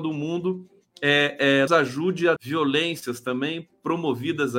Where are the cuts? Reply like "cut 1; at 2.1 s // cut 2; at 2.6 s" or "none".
cut 1; at 1.7 s // cut 2; at 2.4 s